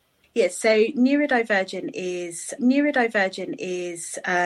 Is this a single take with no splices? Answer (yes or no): no